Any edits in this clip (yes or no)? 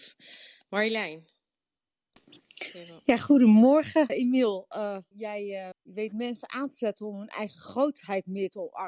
yes